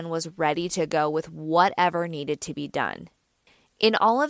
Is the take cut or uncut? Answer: uncut